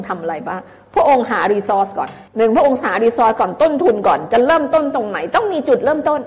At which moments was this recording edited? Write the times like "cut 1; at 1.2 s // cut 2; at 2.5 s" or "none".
cut 1; at 2.3 s